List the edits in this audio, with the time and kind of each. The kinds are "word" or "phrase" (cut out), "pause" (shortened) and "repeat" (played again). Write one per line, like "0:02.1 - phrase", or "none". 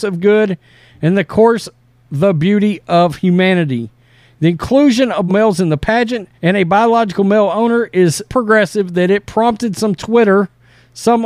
0:05.3 - word
0:06.3 - pause
0:08.3 - word